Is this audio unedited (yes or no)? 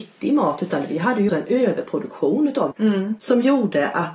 no